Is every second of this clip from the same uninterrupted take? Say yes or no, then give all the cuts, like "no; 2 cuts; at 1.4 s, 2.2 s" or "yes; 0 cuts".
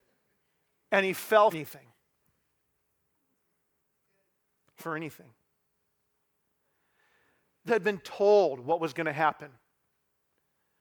no; 3 cuts; at 1.5 s, 4.8 s, 7.7 s